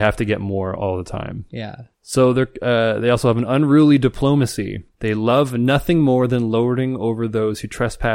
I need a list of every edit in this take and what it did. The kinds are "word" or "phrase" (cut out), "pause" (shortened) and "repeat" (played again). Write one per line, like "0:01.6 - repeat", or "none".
0:01.9 - pause
0:04.9 - pause

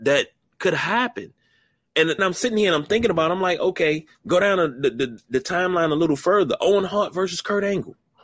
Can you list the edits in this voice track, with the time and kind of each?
0:02.2 - word
0:04.1 - pause

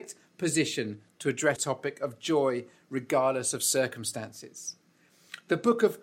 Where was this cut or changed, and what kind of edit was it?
0:01.6 - word

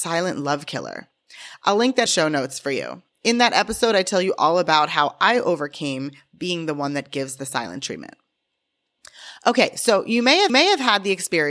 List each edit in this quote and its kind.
0:02.1 - phrase
0:10.5 - repeat

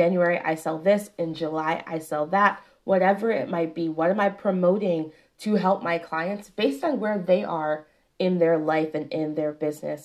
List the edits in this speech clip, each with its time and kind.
none

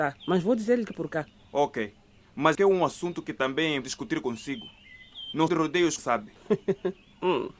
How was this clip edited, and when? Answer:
0:00.9 - word
0:02.5 - word
0:03.8 - word
0:05.5 - word
0:06.0 - word

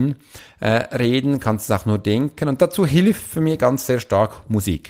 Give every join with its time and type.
none

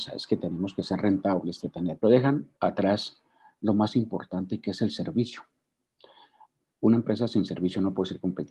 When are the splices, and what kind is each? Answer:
0:01.6 - word
0:02.0 - phrase
0:02.5 - pause

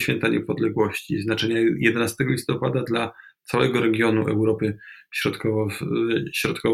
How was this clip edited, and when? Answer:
none

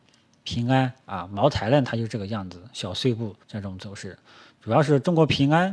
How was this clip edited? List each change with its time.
0:01.0 - pause
0:03.4 - pause

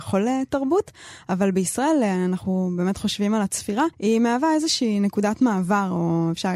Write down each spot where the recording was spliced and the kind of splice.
0:03.9 - pause

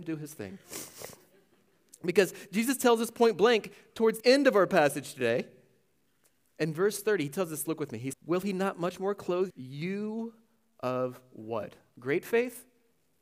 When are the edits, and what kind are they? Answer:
0:04.2 - word
0:07.7 - word
0:08.1 - word
0:09.5 - word

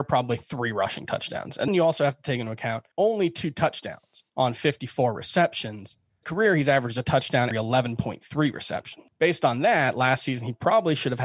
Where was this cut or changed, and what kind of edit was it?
0:01.7 - word
0:02.9 - pause
0:04.3 - pause
0:06.2 - phrase
0:07.5 - word
0:09.1 - word

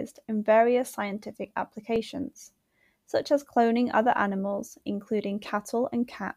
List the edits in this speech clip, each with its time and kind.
none

